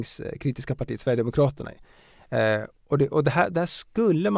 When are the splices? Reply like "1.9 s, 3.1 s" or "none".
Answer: 2.8 s, 3.1 s